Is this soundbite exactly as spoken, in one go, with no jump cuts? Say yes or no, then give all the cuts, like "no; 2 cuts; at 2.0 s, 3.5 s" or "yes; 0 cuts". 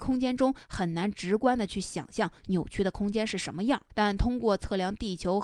no; 1 cut; at 3.9 s